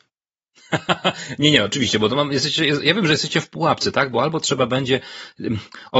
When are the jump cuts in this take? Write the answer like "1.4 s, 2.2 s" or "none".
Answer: none